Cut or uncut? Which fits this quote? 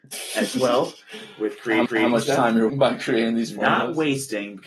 cut